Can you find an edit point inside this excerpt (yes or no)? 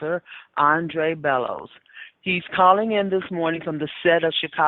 no